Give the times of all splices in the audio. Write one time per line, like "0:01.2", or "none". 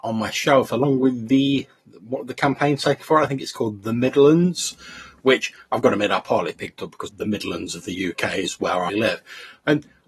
0:07.1
0:08.9